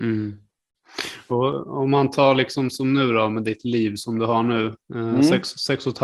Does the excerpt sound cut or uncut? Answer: cut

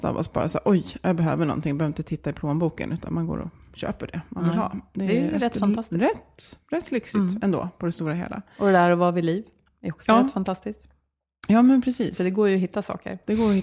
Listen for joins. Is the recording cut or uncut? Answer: uncut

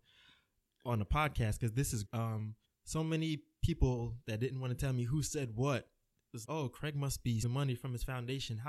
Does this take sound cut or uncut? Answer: cut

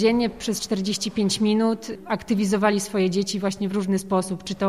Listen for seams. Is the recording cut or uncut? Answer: uncut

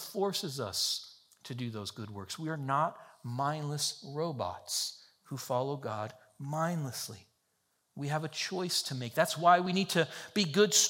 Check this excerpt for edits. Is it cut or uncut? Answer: uncut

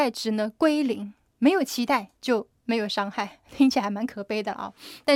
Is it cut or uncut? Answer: cut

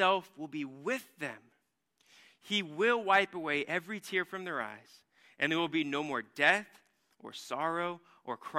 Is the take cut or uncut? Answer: uncut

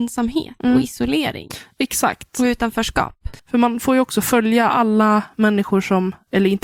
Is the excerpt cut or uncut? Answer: cut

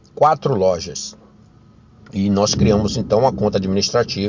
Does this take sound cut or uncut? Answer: uncut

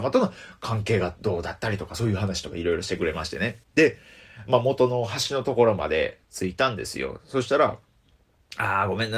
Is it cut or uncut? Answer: cut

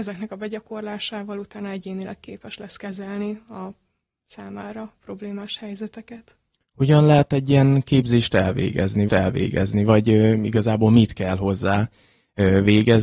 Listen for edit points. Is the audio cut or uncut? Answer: cut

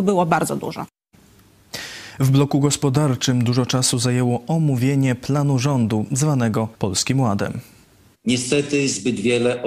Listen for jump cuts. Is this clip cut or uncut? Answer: cut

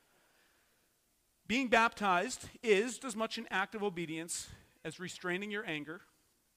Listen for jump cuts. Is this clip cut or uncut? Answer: cut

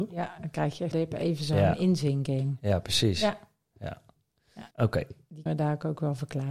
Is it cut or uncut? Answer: cut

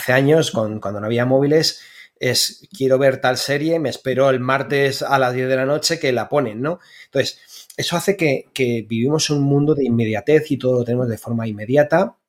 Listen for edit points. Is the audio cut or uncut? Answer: uncut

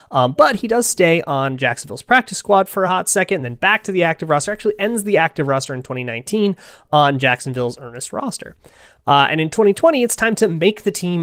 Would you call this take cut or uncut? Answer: uncut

